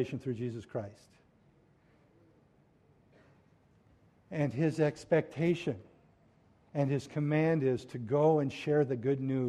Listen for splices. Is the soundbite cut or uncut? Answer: uncut